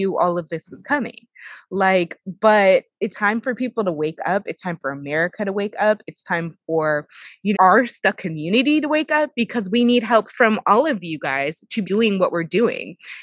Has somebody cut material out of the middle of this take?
yes; 3 cuts; at 3.1 s, 7.5 s, 11.8 s

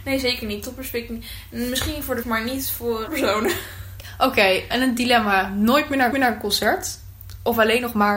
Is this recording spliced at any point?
yes; 4 cuts; at 2.2 s, 3.1 s, 4.7 s, 6.1 s

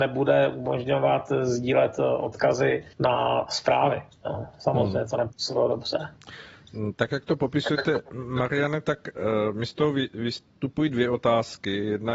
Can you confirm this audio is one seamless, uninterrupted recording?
no; 1 cut; at 2.9 s

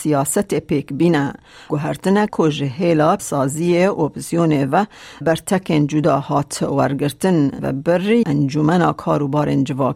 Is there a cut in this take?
yes; 6 cuts; at 1.7 s, 2.3 s, 3.2 s, 5.2 s, 7.6 s, 8.2 s

